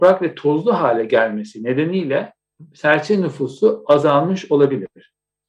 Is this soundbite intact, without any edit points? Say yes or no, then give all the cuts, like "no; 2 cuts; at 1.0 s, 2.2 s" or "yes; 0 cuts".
yes; 0 cuts